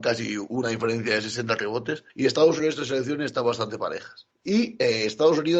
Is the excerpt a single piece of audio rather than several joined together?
no; 3 cuts; at 2.1 s, 2.6 s, 4.3 s

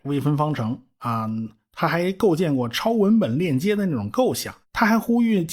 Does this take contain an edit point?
yes; 1 cut; at 4.6 s

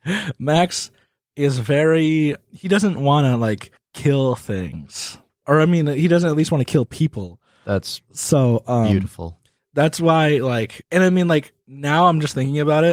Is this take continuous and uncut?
yes; 0 cuts

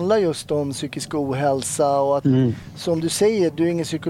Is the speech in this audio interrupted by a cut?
no; 0 cuts

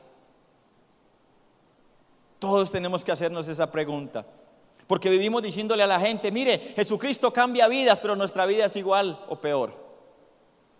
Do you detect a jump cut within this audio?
no; 0 cuts

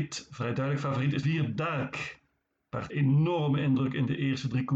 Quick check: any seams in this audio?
yes; 3 cuts; at 1.2 s, 1.6 s, 2.9 s

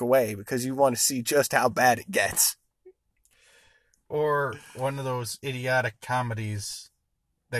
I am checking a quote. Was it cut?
no; 0 cuts

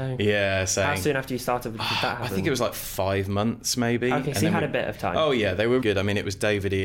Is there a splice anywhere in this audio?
yes; 1 cut; at 5.8 s

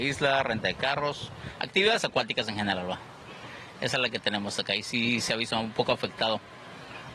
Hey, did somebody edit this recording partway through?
no; 0 cuts

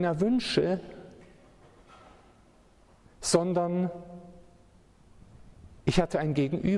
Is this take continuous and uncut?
yes; 0 cuts

